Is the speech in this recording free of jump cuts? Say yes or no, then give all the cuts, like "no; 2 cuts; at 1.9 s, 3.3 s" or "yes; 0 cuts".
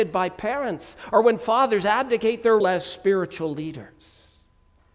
no; 1 cut; at 2.6 s